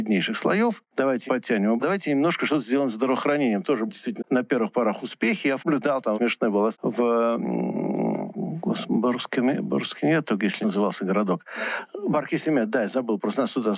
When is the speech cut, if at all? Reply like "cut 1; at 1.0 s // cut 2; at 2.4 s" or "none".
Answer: cut 1; at 1.3 s // cut 2; at 1.8 s // cut 3; at 3.9 s // cut 4; at 4.2 s // cut 5; at 5.6 s // cut 6; at 6.1 s // cut 7; at 6.7 s // cut 8; at 8.3 s // cut 9; at 10.6 s